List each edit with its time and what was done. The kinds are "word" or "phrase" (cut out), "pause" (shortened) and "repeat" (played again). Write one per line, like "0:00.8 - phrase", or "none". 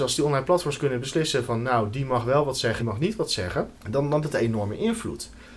0:02.8 - word
0:03.8 - pause
0:04.2 - word